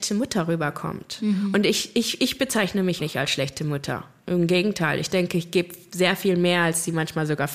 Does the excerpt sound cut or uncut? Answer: cut